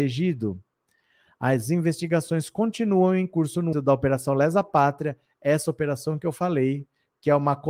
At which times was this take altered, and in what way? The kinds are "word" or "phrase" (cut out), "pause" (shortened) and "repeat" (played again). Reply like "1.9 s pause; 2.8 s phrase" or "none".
3.7 s word